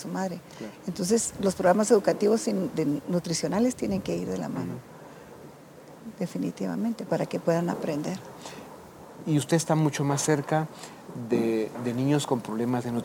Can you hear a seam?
no; 0 cuts

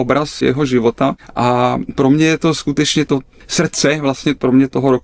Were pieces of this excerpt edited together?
no; 0 cuts

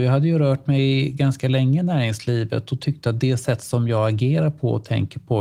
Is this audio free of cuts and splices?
yes; 0 cuts

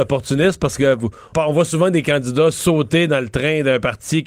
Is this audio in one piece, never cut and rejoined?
no; 1 cut; at 1.3 s

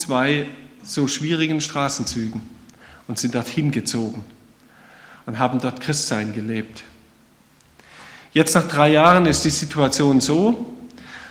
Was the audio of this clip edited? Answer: no; 0 cuts

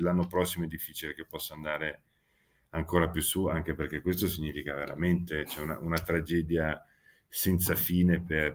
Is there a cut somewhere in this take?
no; 0 cuts

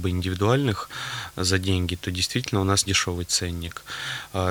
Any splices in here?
yes; 1 cut; at 2.9 s

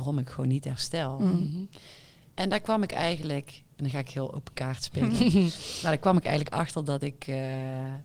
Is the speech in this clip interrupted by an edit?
no; 0 cuts

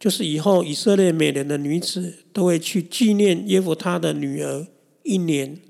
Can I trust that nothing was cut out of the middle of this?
yes; 0 cuts

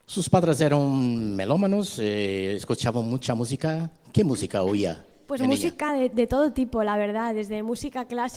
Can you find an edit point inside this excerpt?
no; 0 cuts

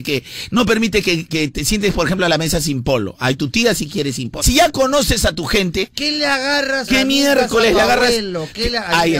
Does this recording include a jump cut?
yes; 3 cuts; at 1.3 s, 4.4 s, 6.9 s

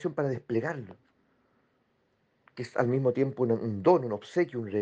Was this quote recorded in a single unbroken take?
yes; 0 cuts

